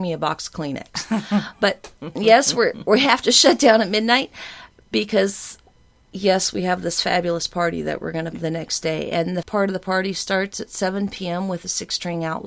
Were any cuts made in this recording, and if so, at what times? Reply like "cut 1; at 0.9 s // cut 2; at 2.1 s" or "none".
cut 1; at 8.3 s // cut 2; at 9.4 s